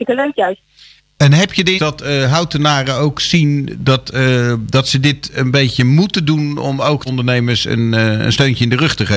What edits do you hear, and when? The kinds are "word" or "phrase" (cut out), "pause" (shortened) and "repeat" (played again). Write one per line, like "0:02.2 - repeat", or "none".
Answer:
0:01.8 - word
0:07.1 - phrase